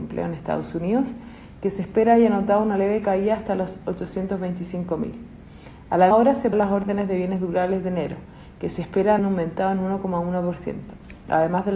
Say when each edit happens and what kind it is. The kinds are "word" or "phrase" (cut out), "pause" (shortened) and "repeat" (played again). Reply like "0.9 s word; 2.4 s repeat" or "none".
6.1 s word; 6.5 s word; 9.2 s word